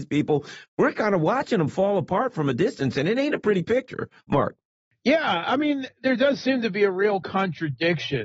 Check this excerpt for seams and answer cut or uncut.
cut